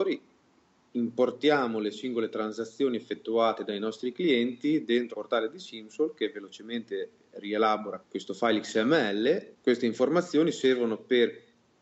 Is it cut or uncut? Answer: cut